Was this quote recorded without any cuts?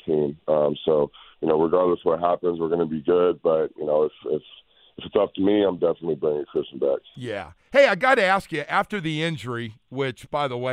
yes; 0 cuts

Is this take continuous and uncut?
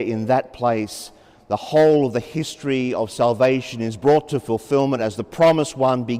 yes; 0 cuts

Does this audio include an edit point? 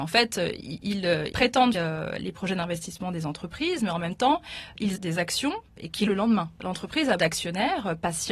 yes; 5 cuts; at 1.3 s, 1.7 s, 5.0 s, 6.1 s, 7.2 s

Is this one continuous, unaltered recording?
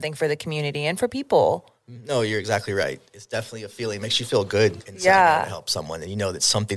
yes; 0 cuts

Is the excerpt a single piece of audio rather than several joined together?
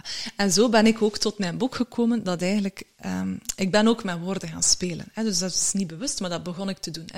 yes; 0 cuts

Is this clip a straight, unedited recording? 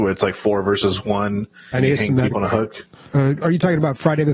no; 3 cuts; at 1.7 s, 2.3 s, 3.4 s

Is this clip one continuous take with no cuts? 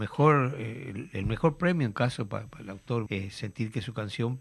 no; 2 cuts; at 1.9 s, 3.1 s

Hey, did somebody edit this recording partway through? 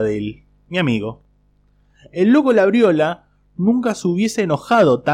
no; 0 cuts

